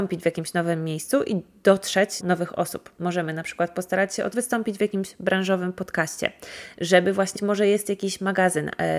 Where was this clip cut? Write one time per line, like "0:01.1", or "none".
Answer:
0:02.2
0:04.3
0:07.4